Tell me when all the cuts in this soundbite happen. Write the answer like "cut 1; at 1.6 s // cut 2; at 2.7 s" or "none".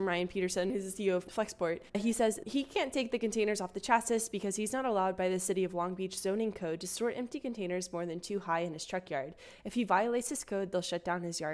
cut 1; at 1.9 s